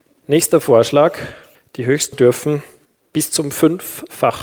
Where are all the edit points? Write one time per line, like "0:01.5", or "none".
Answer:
0:01.5
0:02.1
0:02.8